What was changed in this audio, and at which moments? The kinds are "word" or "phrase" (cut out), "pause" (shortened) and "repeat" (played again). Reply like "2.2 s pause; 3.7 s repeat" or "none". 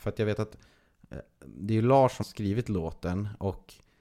2.2 s word